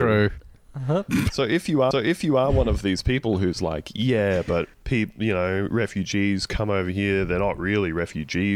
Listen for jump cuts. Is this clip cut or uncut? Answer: cut